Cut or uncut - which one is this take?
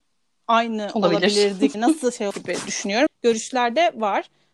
cut